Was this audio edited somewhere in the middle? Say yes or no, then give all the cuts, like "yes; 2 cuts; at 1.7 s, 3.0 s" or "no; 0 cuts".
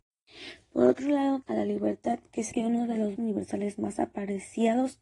yes; 3 cuts; at 1.4 s, 2.5 s, 3.2 s